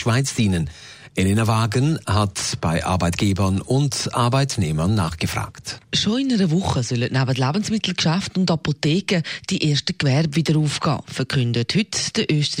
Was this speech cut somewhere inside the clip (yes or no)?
yes